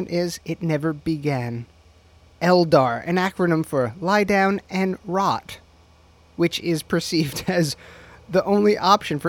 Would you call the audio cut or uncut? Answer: uncut